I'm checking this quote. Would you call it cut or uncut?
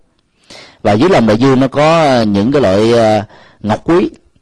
uncut